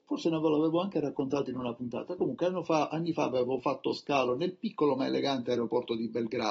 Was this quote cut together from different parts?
no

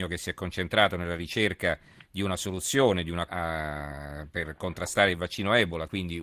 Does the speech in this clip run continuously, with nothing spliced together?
no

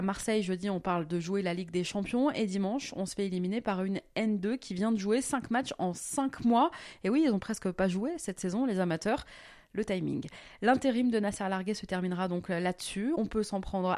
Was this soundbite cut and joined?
no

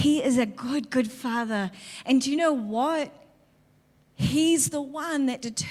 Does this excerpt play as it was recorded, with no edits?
yes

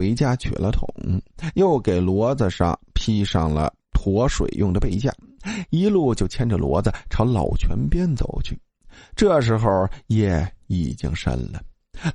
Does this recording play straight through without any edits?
no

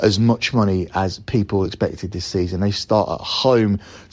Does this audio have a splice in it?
no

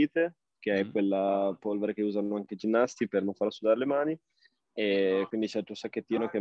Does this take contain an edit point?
no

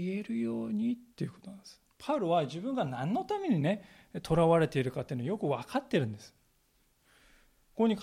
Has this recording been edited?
yes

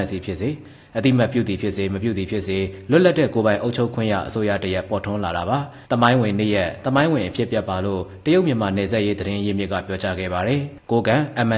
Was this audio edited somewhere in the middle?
yes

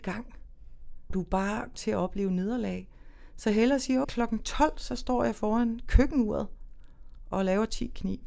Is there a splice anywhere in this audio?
yes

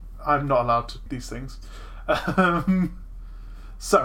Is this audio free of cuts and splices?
no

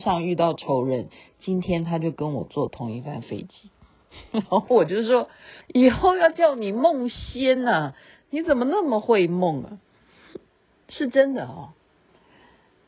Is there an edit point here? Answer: yes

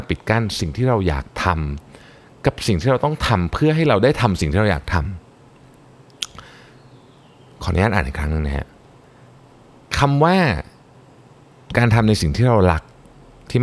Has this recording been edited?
no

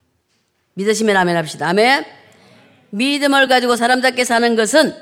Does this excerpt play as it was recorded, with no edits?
yes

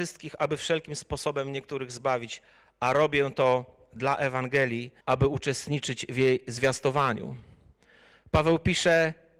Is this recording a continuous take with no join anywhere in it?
no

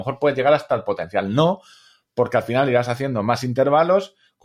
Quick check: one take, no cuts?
yes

